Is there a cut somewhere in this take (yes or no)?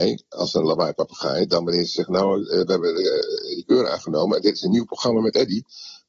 no